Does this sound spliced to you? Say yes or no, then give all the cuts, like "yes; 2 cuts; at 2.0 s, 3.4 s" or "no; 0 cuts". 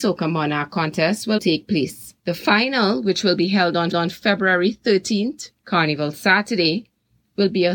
yes; 4 cuts; at 1.4 s, 2.2 s, 3.9 s, 5.6 s